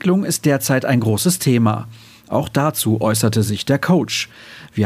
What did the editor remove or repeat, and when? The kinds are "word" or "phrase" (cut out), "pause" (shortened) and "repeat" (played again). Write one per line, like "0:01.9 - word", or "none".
none